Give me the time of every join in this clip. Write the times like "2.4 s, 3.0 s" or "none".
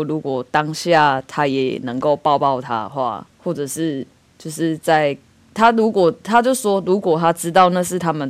3.3 s

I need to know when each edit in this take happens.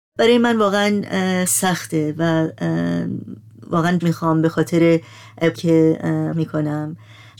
1.5 s, 4.0 s, 5.5 s, 6.3 s

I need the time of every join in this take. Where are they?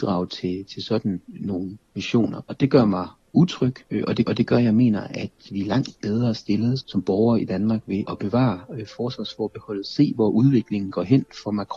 1.8 s, 3.8 s, 4.3 s, 6.8 s, 8.1 s

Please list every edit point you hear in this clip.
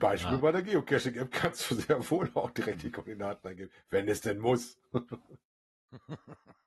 5.4 s

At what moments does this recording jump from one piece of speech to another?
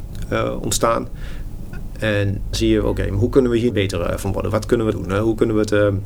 2.5 s, 3.7 s, 4.9 s

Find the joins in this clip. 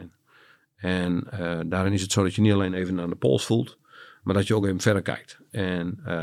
none

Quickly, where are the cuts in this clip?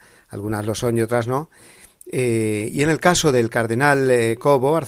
none

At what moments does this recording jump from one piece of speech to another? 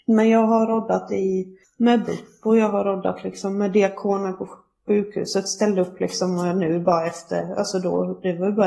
none

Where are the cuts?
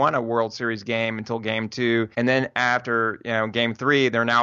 2.1 s

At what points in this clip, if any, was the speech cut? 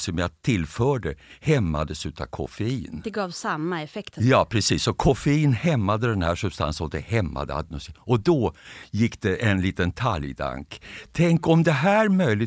none

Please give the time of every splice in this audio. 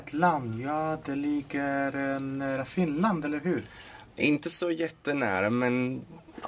none

